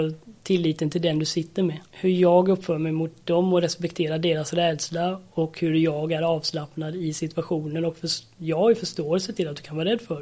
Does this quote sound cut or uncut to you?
cut